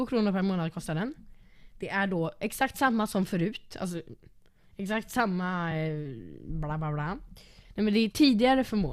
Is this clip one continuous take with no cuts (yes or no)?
yes